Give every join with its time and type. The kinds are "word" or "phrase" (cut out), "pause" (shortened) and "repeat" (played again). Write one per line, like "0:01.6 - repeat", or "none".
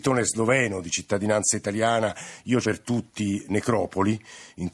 0:02.6 - word